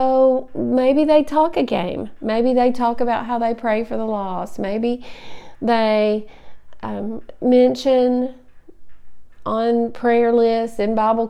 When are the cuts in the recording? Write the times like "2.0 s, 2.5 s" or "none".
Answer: none